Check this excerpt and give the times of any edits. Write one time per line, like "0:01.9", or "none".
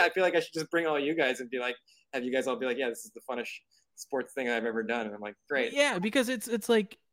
none